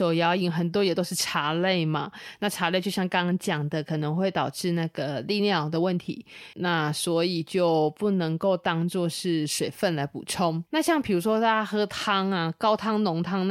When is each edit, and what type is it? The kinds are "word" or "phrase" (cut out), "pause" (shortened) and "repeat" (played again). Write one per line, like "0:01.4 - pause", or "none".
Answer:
0:06.5 - word
0:10.7 - pause